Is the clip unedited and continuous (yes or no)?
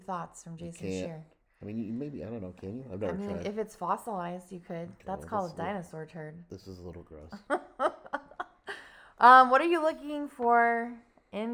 yes